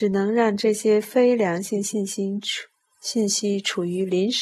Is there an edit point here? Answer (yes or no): no